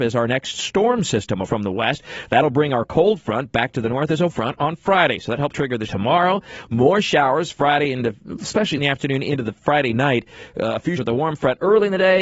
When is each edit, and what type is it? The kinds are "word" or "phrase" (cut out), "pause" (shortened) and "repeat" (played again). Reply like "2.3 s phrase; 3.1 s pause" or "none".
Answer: 1.4 s word; 4.3 s word; 5.5 s word; 5.9 s word; 8.8 s word; 11.0 s word